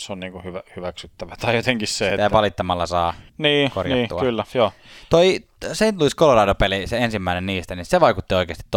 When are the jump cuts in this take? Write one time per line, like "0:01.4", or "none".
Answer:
0:03.3